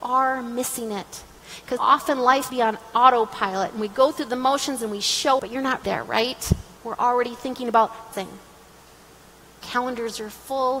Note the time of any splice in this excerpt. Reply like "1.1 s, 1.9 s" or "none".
1.8 s, 2.5 s, 5.4 s, 5.8 s, 6.8 s, 8.1 s